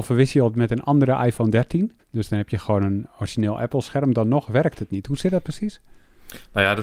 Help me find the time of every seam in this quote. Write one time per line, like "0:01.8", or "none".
0:02.0